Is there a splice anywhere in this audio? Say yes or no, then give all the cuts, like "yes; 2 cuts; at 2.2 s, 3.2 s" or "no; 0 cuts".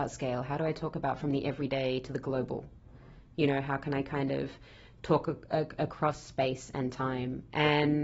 no; 0 cuts